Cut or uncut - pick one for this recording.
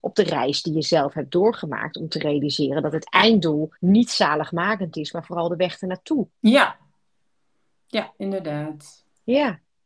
cut